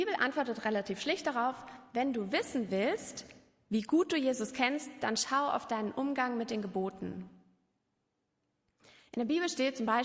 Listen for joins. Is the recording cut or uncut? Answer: uncut